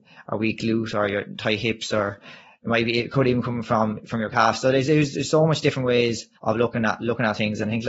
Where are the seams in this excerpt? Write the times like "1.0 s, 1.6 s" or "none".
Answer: 6.4 s